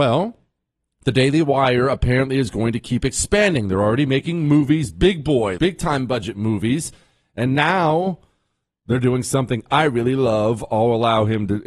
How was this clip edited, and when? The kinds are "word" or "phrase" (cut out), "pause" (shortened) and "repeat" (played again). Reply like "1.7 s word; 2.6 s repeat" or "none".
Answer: 5.6 s word